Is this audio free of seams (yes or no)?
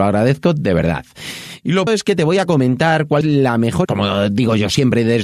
no